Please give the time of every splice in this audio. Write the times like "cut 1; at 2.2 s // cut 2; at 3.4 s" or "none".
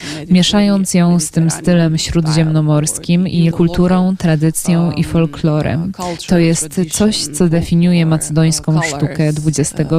cut 1; at 3.5 s